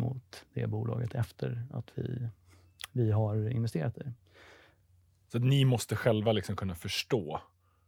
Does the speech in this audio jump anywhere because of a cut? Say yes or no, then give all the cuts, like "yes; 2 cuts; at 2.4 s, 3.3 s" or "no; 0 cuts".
no; 0 cuts